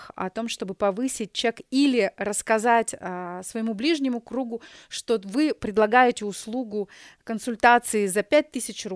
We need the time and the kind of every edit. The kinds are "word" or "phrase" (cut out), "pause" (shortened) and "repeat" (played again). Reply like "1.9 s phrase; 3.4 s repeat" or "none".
none